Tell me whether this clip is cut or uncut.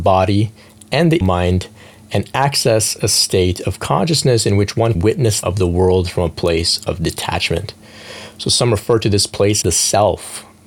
cut